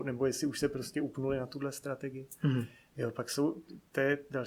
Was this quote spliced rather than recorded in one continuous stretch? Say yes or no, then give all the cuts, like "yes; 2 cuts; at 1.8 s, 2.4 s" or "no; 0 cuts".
no; 0 cuts